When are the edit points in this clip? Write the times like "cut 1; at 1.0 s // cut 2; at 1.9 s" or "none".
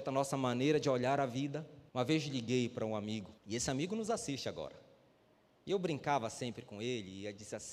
cut 1; at 1.9 s // cut 2; at 3.4 s